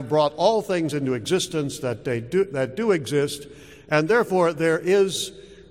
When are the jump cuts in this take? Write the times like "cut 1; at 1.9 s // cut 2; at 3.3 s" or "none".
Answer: none